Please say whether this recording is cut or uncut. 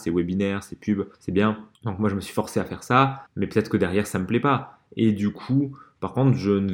cut